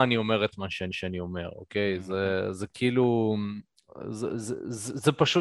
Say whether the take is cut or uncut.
cut